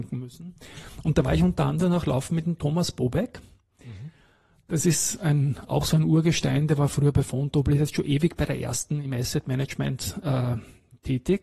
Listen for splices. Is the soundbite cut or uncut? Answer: uncut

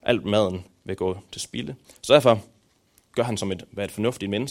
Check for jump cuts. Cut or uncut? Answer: uncut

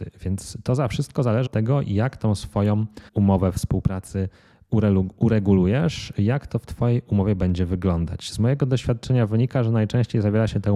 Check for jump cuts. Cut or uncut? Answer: cut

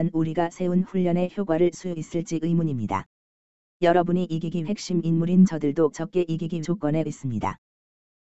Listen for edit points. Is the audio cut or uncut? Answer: cut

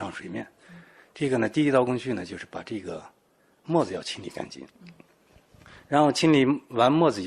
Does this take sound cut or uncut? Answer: uncut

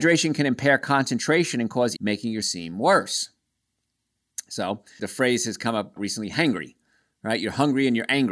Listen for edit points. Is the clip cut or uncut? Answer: cut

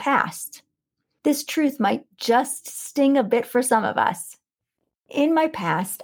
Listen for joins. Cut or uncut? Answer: uncut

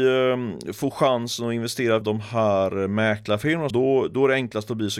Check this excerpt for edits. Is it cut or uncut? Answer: cut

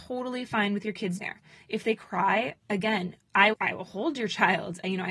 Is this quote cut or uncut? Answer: cut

